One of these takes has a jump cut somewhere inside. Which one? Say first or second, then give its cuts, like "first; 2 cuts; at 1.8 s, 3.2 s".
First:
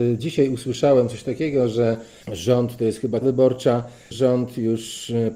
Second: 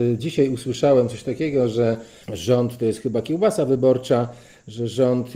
first; 2 cuts; at 3.2 s, 4.1 s